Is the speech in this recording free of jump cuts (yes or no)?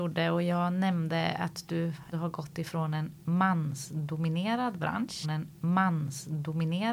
no